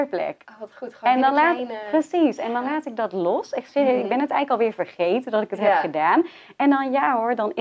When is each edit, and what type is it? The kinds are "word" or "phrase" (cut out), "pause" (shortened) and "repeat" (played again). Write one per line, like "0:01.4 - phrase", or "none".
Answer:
none